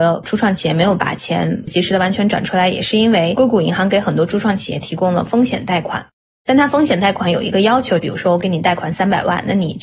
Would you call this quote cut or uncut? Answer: uncut